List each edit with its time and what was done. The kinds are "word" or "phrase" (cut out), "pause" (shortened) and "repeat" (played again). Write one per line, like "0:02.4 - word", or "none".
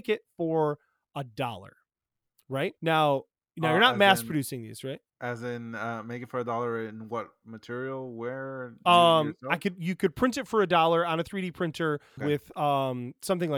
0:02.8 - pause
0:05.1 - pause
0:12.2 - word